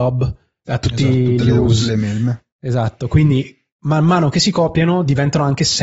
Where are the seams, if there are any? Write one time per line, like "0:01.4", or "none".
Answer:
none